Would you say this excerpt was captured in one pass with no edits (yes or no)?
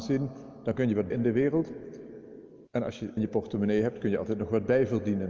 no